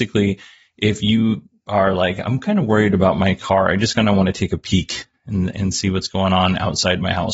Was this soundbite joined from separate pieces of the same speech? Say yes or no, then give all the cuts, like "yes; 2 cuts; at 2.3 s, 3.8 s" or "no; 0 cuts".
no; 0 cuts